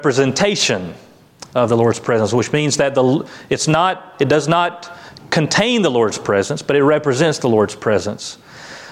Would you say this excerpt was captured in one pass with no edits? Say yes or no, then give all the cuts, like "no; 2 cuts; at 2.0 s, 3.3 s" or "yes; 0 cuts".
yes; 0 cuts